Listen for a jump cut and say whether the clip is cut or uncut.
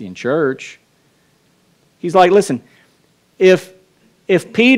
uncut